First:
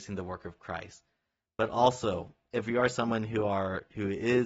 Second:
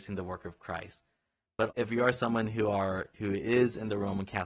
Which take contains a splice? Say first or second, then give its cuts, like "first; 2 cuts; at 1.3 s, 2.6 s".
second; 1 cut; at 1.7 s